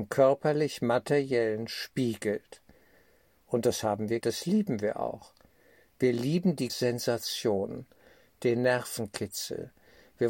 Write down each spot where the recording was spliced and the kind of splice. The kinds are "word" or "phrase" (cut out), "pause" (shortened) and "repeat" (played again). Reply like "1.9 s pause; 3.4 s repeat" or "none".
4.2 s word; 6.7 s word